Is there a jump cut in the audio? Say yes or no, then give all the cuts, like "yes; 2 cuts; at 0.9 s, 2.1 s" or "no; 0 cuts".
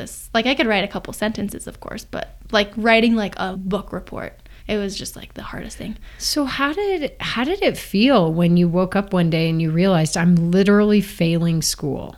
yes; 2 cuts; at 3.5 s, 4.6 s